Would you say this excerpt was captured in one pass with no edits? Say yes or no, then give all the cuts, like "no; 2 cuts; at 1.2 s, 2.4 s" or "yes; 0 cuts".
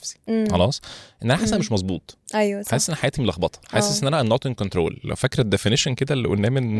yes; 0 cuts